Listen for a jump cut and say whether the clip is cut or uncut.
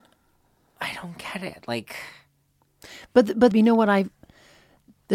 cut